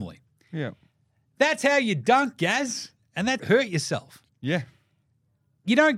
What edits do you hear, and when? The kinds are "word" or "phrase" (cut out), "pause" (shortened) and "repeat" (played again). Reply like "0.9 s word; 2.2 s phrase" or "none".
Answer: 3.4 s phrase

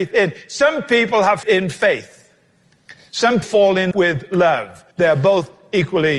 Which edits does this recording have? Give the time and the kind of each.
1.4 s word; 3.4 s word; 3.9 s word; 4.9 s pause

